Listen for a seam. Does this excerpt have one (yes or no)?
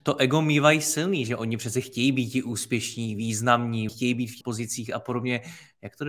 yes